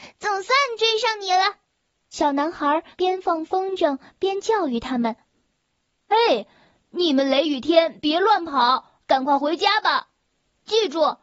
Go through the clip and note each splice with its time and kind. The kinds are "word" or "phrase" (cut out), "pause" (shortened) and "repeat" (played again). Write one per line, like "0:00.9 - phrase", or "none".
0:02.9 - pause